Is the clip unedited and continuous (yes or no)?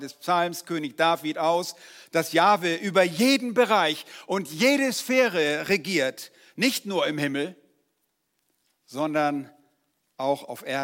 yes